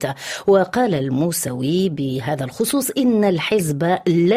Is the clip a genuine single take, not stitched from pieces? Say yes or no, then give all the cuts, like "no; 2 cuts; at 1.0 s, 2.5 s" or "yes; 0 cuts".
yes; 0 cuts